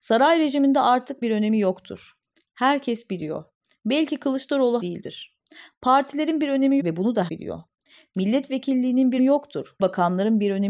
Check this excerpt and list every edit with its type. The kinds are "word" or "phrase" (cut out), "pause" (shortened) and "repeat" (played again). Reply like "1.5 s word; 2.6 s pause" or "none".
1.2 s word; 4.8 s word; 6.8 s word; 7.3 s word; 9.2 s word; 9.8 s word